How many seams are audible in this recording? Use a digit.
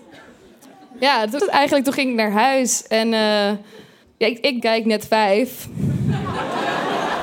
3